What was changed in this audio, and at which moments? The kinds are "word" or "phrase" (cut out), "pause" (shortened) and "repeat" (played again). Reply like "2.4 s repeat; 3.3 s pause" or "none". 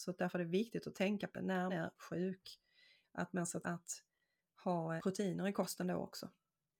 1.3 s word; 1.7 s word; 3.6 s word; 5.0 s word